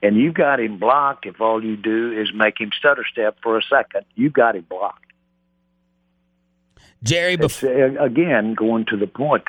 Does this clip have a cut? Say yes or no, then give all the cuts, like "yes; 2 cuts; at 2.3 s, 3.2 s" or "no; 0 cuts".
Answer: no; 0 cuts